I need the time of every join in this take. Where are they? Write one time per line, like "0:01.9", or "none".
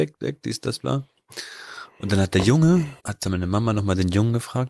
0:03.0